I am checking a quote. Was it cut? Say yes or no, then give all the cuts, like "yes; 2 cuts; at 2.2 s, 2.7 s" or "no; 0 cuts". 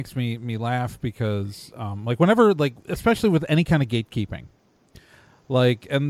no; 0 cuts